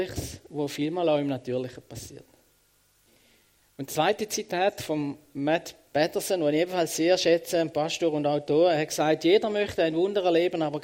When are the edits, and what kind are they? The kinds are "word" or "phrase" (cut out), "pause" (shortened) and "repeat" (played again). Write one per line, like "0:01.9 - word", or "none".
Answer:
none

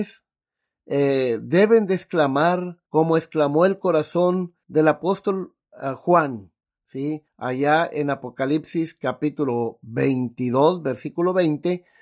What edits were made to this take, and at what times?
0:02.9 - pause
0:04.6 - pause
0:07.3 - pause

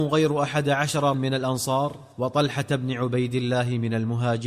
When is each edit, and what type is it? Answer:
0:01.1 - word
0:02.1 - pause

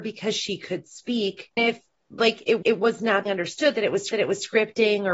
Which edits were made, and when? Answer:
0:01.6 - word
0:02.6 - repeat
0:03.3 - word
0:04.1 - repeat

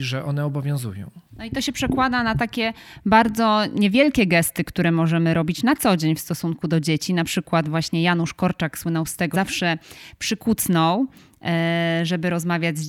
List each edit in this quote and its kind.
0:09.3 - word

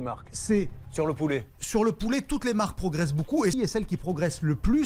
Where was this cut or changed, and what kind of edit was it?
0:03.5 - word

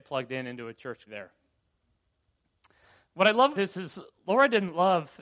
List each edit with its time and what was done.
0:01.1 - word
0:03.5 - word

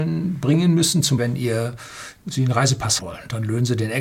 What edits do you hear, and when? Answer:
0:01.2 - word
0:03.0 - word

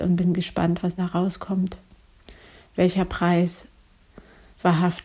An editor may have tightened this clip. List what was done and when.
0:01.0 - word

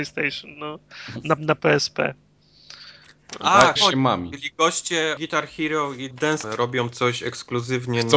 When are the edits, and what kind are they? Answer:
0:01.4 - word
0:03.8 - word
0:05.2 - word
0:06.1 - word
0:06.4 - word

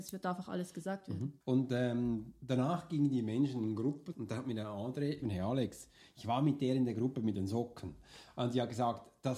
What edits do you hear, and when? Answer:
0:01.4 - pause
0:04.1 - word
0:05.2 - word

